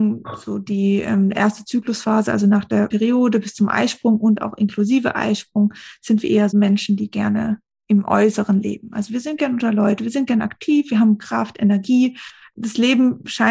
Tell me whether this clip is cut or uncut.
cut